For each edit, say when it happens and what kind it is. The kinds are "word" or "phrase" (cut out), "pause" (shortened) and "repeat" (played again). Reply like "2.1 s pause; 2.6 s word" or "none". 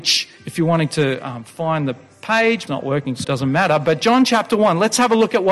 2.7 s phrase; 3.2 s word